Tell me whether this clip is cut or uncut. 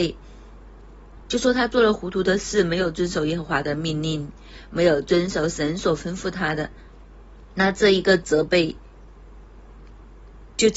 cut